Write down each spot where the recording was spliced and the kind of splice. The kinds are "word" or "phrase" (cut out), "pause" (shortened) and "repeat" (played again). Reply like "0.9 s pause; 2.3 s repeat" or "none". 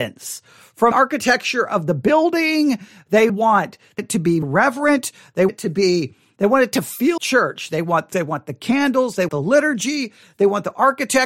0.9 s word; 3.3 s word; 4.0 s word; 4.4 s word; 5.5 s word; 7.2 s word; 8.1 s word; 9.3 s word